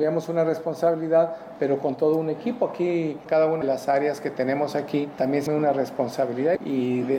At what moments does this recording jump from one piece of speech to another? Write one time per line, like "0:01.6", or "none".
0:03.6
0:05.5